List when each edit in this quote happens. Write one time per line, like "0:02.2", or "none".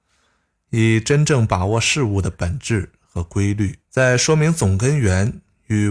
0:03.8